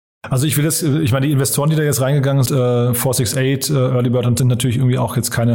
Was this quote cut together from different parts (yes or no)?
yes